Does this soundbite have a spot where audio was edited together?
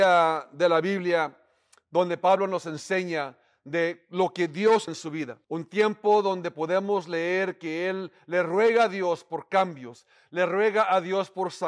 yes; 2 cuts; at 4.9 s, 5.4 s

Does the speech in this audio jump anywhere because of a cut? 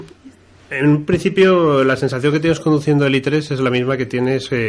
no; 0 cuts

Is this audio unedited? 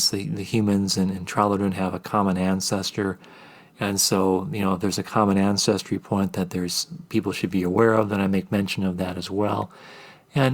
yes; 0 cuts

